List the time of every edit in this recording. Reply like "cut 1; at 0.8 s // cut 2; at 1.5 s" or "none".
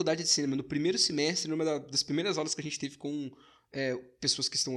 none